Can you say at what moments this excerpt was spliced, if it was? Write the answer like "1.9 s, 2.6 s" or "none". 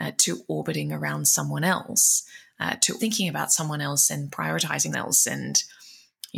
3.0 s, 4.9 s